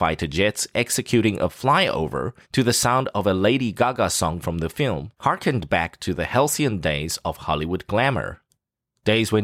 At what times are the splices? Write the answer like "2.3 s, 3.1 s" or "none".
2.4 s, 5.2 s